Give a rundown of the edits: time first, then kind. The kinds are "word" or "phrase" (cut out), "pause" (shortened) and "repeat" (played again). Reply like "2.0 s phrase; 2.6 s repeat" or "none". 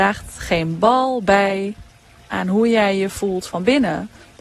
none